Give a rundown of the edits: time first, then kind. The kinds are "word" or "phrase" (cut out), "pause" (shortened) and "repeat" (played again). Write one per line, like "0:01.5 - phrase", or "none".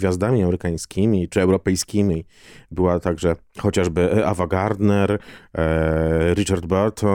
none